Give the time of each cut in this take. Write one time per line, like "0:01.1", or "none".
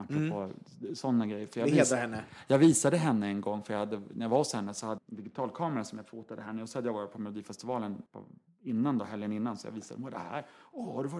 0:05.0
0:08.1